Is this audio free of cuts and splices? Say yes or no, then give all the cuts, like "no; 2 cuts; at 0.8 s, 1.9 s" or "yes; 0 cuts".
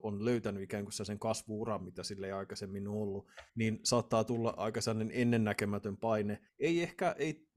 no; 2 cuts; at 3.5 s, 6.5 s